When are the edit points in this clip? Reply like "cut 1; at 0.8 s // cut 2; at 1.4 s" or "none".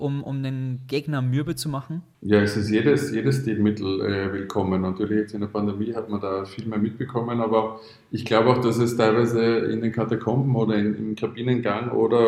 none

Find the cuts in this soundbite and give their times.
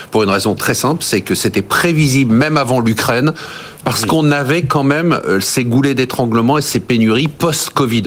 none

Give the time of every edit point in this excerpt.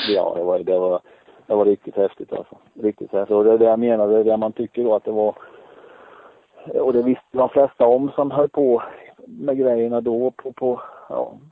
none

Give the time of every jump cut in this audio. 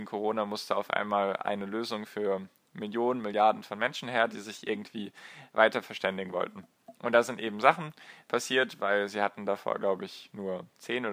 none

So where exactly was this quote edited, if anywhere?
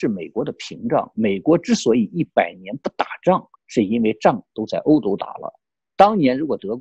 cut 1; at 3.5 s

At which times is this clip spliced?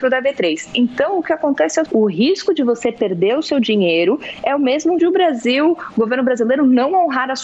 cut 1; at 1.9 s // cut 2; at 5.0 s

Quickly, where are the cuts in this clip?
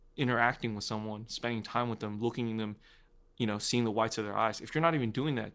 none

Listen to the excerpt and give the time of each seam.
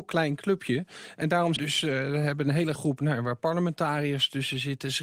cut 1; at 1.6 s // cut 2; at 2.8 s

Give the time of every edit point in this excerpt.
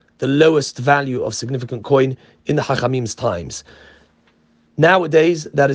none

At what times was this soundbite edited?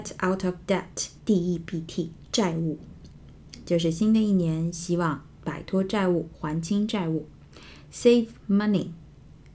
cut 1; at 1.2 s

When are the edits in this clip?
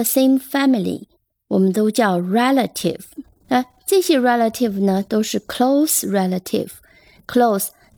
cut 1; at 1.2 s // cut 2; at 3.3 s

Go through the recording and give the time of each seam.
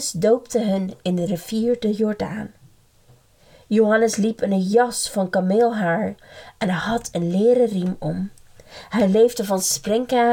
none

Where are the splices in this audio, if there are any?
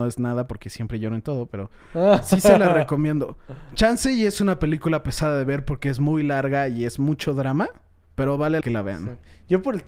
cut 1; at 8.1 s // cut 2; at 8.6 s

